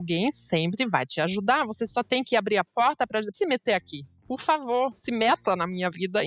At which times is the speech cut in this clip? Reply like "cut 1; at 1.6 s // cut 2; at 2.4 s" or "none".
cut 1; at 3.3 s